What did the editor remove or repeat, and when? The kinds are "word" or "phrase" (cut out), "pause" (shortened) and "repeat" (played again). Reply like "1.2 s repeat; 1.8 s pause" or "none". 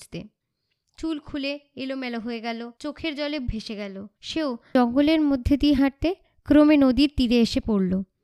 2.8 s pause; 3.5 s word; 4.2 s pause; 5.8 s word